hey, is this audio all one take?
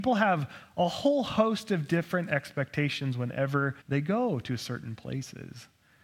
no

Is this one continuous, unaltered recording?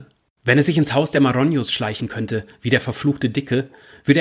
yes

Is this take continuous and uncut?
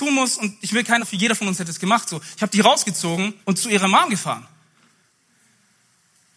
no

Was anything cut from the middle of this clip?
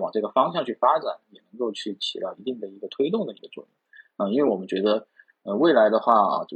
no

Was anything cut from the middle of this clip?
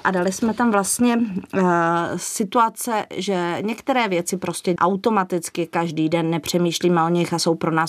yes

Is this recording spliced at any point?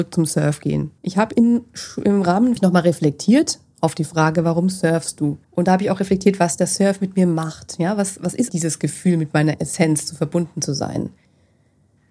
yes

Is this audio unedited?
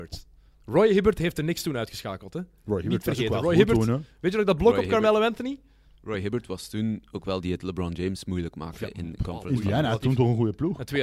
no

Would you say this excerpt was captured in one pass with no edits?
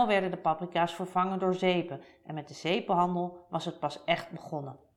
yes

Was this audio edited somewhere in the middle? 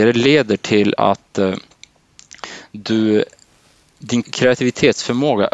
yes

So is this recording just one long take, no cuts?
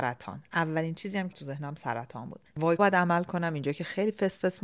no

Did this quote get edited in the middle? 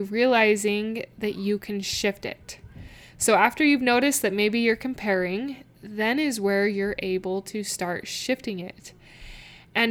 no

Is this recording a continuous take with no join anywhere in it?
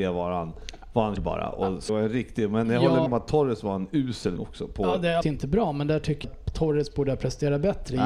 no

